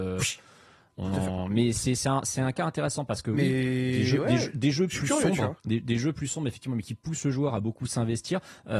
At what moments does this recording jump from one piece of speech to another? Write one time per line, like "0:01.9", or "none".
0:05.6